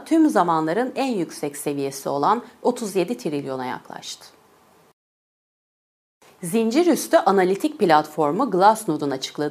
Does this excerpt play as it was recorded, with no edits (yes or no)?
yes